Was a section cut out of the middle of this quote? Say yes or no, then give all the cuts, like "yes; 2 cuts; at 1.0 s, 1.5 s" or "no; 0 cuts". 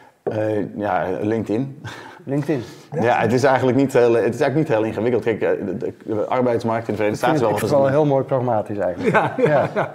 yes; 1 cut; at 7.6 s